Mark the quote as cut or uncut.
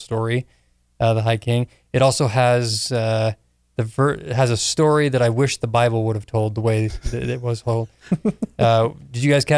uncut